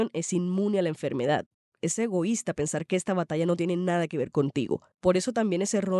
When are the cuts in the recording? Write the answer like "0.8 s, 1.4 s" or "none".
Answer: none